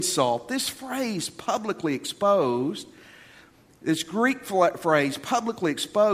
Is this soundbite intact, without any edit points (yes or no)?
yes